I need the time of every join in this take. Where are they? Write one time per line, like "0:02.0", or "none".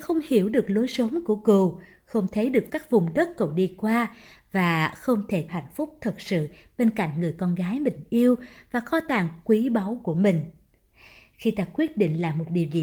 0:02.7
0:05.5